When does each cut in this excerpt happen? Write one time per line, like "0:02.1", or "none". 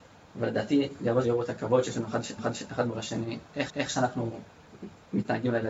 0:01.2
0:02.4
0:03.7